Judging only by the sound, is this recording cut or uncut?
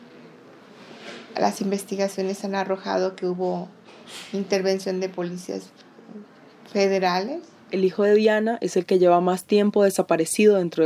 uncut